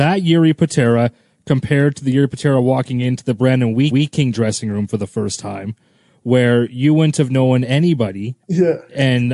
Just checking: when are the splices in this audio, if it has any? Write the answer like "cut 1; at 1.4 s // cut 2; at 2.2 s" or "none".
cut 1; at 3.9 s // cut 2; at 8.4 s